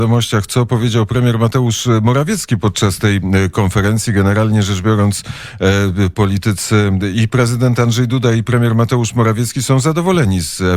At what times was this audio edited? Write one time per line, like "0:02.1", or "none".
none